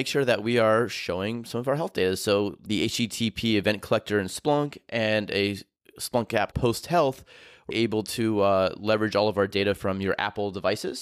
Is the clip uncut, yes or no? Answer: no